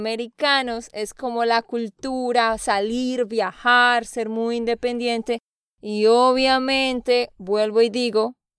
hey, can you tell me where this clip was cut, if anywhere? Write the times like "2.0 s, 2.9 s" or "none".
none